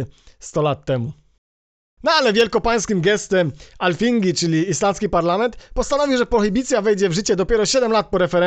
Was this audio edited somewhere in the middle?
no; 0 cuts

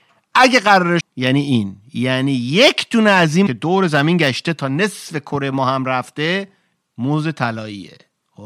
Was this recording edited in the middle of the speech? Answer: yes; 2 cuts; at 1.0 s, 3.5 s

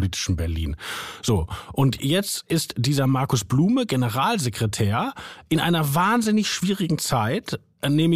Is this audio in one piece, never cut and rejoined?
yes; 0 cuts

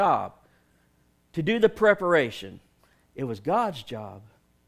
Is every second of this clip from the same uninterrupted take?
no; 1 cut; at 2.8 s

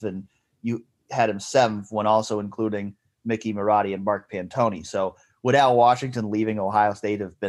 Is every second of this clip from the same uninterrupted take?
yes; 0 cuts

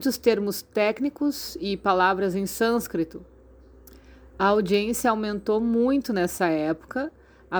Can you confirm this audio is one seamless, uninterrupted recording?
yes; 0 cuts

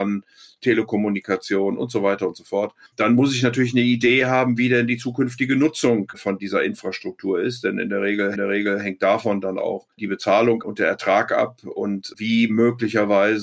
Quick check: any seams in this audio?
yes; 3 cuts; at 2.9 s, 8.4 s, 9.9 s

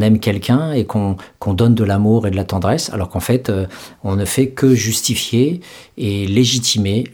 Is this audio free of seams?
yes; 0 cuts

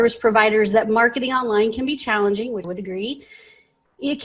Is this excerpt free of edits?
no; 1 cut; at 2.6 s

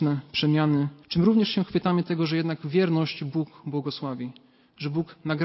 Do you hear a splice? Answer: yes; 1 cut; at 1.0 s

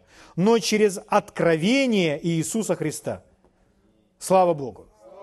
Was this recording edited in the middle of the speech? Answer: no; 0 cuts

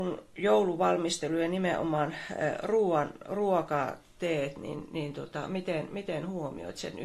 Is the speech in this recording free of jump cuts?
yes; 0 cuts

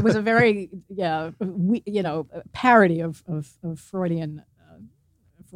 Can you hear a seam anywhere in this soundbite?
no; 0 cuts

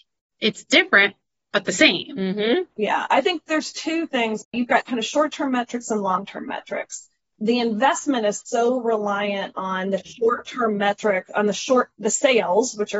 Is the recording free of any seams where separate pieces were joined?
yes; 0 cuts

